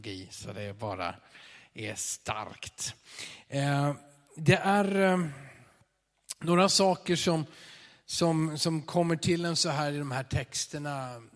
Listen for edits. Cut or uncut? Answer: uncut